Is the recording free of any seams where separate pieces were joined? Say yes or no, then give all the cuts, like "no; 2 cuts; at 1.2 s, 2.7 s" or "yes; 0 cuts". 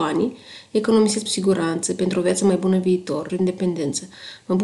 no; 2 cuts; at 1.3 s, 3.3 s